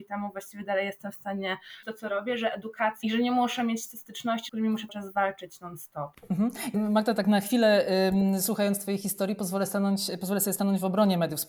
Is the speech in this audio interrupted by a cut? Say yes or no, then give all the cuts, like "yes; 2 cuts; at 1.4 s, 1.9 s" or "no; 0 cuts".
yes; 5 cuts; at 1.8 s, 3.0 s, 4.5 s, 4.9 s, 6.7 s